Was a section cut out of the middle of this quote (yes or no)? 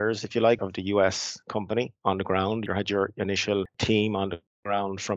no